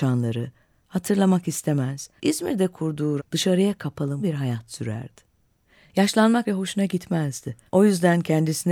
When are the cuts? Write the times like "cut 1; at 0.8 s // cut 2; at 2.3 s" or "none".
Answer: cut 1; at 2.2 s // cut 2; at 3.2 s // cut 3; at 4.2 s // cut 4; at 6.4 s // cut 5; at 7.7 s